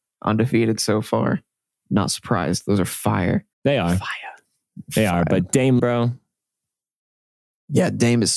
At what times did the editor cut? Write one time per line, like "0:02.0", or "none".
0:03.5
0:05.8